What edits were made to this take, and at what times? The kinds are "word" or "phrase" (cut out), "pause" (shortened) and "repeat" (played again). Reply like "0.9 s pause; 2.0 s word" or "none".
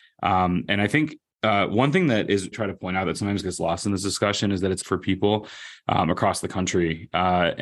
2.5 s phrase; 4.8 s phrase